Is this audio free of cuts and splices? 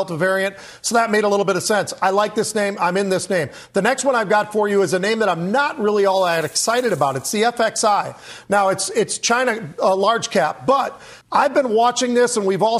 no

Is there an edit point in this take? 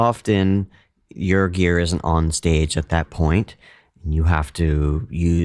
no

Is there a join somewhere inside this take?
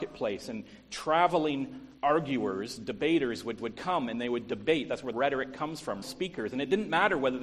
yes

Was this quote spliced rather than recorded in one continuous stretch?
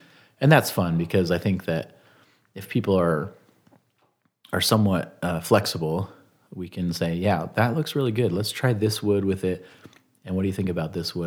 no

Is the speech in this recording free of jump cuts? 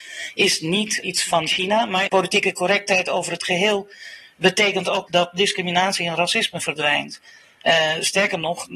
no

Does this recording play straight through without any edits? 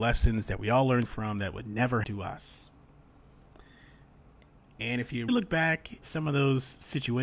no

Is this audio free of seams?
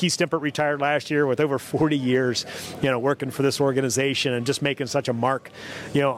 yes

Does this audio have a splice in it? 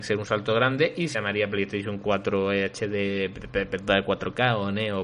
yes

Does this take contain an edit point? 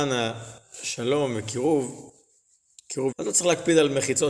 yes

